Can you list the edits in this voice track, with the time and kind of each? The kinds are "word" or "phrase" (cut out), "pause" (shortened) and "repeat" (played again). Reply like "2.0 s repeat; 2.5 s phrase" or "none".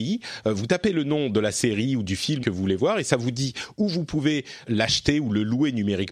2.4 s phrase; 4.6 s word